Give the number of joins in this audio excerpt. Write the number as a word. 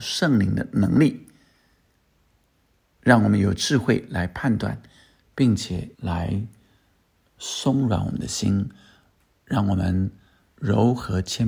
one